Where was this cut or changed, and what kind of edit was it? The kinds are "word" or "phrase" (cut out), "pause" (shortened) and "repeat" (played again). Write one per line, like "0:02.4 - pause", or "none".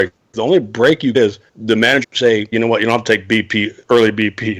0:01.1 - word
0:01.5 - pause
0:02.0 - word
0:02.5 - word